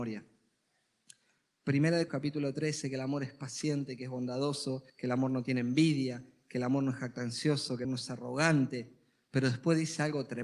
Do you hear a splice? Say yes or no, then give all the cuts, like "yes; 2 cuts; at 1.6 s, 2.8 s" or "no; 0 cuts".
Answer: yes; 4 cuts; at 2.1 s, 2.8 s, 4.9 s, 7.8 s